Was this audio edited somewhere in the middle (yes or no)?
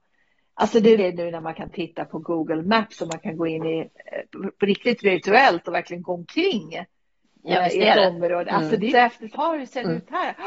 yes